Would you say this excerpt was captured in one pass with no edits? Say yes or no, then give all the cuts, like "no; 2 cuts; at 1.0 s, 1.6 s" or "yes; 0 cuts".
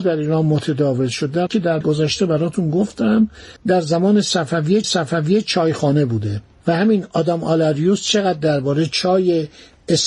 no; 4 cuts; at 1.5 s, 1.8 s, 3.6 s, 4.8 s